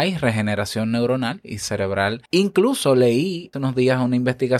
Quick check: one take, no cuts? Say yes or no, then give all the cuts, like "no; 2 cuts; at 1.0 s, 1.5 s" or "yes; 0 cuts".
no; 2 cuts; at 2.3 s, 3.5 s